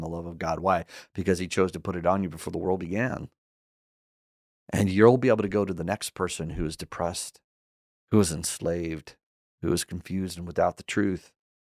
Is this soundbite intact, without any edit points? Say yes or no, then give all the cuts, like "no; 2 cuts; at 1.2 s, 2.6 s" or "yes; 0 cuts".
yes; 0 cuts